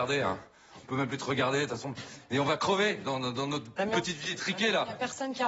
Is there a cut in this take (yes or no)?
no